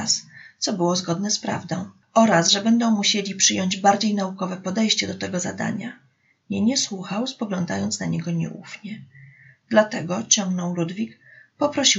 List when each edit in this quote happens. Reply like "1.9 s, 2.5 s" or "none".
none